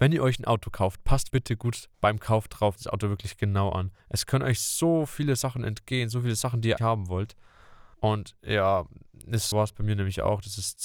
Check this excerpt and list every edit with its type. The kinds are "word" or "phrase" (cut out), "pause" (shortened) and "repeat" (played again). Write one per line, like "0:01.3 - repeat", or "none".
0:01.3 - word
0:01.9 - pause
0:02.8 - phrase
0:04.0 - pause
0:06.8 - word
0:07.9 - pause
0:09.5 - word